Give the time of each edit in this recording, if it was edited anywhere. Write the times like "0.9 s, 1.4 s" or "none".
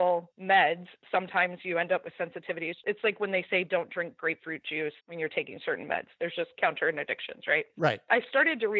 5.0 s